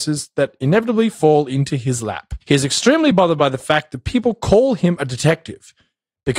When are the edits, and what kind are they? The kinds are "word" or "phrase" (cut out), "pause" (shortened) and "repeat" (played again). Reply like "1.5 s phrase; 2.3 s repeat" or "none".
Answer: none